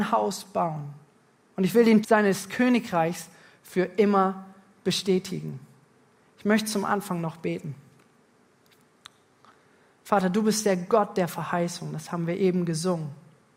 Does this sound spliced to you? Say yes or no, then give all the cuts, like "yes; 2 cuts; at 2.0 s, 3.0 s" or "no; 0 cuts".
yes; 1 cut; at 2.0 s